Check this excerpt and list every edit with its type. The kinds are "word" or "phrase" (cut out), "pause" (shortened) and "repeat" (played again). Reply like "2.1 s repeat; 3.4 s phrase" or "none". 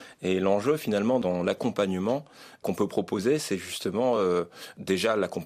none